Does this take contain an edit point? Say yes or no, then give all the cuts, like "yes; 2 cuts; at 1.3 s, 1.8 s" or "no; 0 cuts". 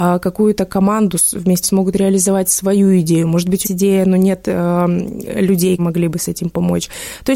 yes; 3 cuts; at 1.6 s, 3.6 s, 5.8 s